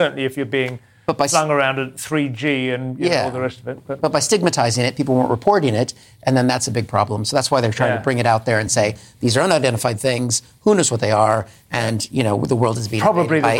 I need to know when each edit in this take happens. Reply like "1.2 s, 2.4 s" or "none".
none